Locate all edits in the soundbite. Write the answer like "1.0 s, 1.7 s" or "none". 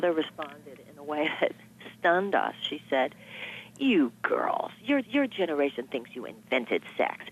5.0 s